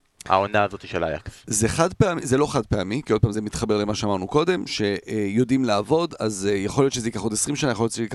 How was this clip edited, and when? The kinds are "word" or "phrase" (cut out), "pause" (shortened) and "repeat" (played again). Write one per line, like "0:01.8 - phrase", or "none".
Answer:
0:03.3 - word